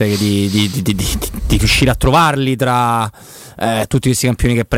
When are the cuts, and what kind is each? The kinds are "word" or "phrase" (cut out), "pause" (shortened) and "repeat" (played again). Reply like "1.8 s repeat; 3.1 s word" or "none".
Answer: none